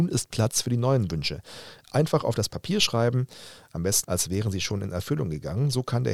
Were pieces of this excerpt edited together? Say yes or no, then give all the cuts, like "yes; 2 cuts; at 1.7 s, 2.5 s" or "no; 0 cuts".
yes; 1 cut; at 4.0 s